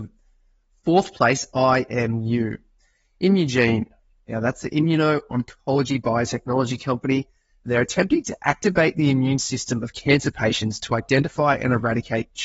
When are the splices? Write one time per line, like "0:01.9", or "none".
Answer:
none